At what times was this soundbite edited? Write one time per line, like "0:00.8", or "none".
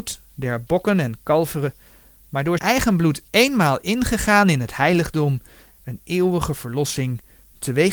0:02.6